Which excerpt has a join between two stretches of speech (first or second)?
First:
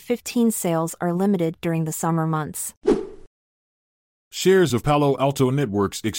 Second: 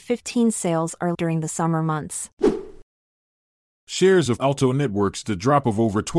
second